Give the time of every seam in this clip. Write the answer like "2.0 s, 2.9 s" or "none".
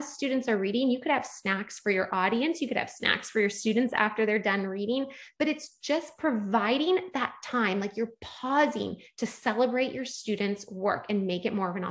none